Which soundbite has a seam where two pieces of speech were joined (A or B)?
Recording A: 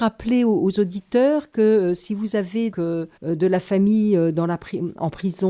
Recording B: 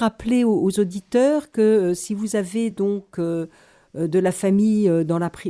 A